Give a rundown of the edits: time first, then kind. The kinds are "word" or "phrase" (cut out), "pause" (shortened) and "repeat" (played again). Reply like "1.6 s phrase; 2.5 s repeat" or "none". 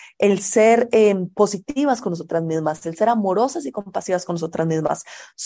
none